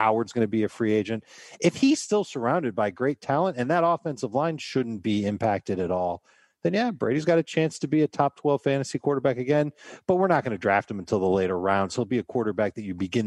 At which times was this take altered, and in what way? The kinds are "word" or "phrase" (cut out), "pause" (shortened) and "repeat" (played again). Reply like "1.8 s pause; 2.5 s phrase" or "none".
none